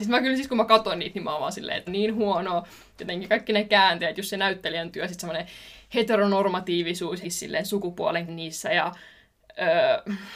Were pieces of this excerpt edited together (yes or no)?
yes